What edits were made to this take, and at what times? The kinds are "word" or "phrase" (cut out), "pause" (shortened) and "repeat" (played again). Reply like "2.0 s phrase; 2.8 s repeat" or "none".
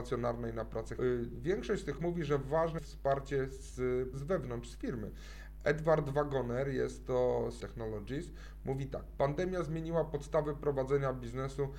1.0 s phrase; 2.0 s word; 2.8 s word; 4.1 s word; 7.6 s phrase